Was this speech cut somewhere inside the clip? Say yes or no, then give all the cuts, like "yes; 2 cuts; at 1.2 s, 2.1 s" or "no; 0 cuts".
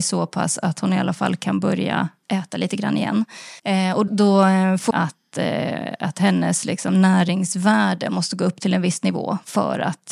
yes; 3 cuts; at 3.6 s, 4.1 s, 4.9 s